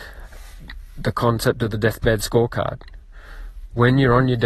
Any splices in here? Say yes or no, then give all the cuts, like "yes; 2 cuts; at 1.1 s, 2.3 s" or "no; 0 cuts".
no; 0 cuts